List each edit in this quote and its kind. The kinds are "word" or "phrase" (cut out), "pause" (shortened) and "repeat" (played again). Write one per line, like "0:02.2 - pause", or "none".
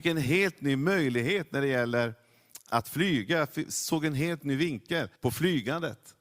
0:05.2 - pause